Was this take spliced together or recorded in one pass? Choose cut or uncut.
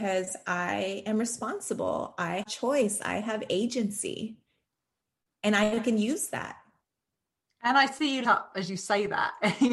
cut